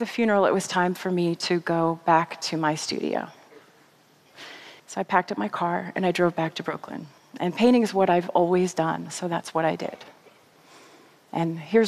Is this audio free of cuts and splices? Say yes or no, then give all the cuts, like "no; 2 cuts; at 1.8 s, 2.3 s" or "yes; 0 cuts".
no; 2 cuts; at 4.8 s, 7.2 s